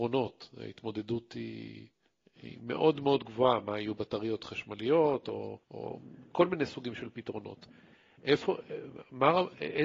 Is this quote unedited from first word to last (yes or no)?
no